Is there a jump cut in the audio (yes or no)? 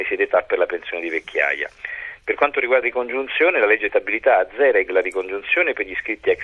yes